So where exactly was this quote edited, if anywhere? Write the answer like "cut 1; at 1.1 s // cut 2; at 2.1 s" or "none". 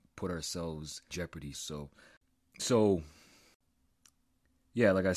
cut 1; at 1.1 s // cut 2; at 1.5 s